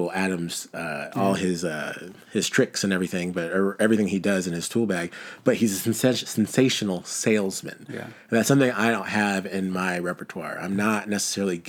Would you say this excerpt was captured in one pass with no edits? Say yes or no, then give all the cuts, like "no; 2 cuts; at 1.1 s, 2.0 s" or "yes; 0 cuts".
no; 1 cut; at 2.2 s